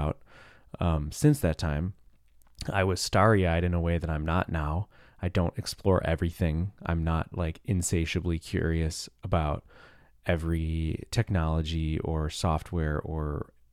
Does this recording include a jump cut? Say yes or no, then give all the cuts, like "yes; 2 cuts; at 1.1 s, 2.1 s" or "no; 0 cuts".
no; 0 cuts